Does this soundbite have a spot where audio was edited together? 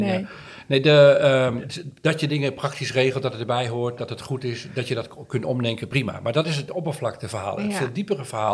no; 0 cuts

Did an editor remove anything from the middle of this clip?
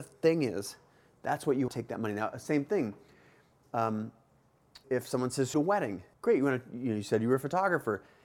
yes; 4 cuts; at 1.7 s, 4.8 s, 5.5 s, 6.1 s

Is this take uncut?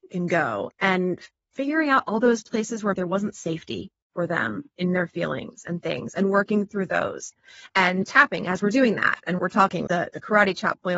no; 3 cuts; at 2.9 s, 9.4 s, 9.9 s

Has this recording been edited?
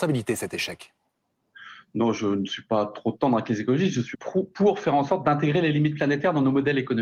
yes; 1 cut; at 4.1 s

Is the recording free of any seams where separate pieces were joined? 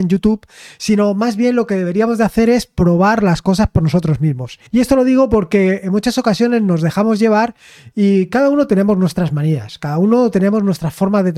no; 1 cut; at 4.7 s

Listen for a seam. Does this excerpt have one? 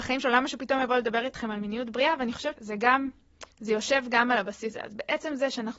yes; 3 cuts; at 2.6 s, 3.5 s, 4.7 s

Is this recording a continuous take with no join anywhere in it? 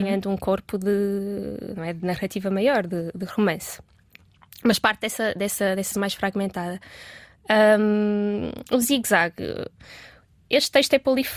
no; 1 cut; at 5.9 s

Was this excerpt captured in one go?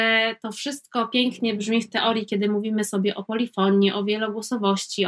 yes; 0 cuts

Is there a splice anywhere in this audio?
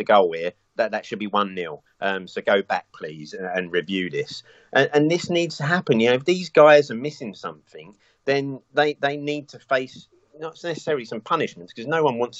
no; 0 cuts

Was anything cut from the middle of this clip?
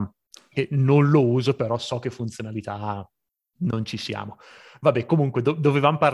no; 0 cuts

